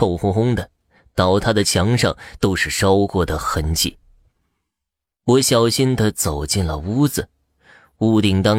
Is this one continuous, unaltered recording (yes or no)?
yes